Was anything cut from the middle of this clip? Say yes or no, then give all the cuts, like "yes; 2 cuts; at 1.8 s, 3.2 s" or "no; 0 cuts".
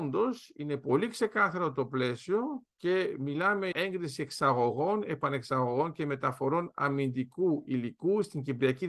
yes; 1 cut; at 3.7 s